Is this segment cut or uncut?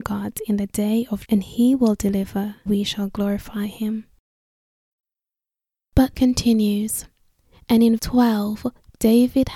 cut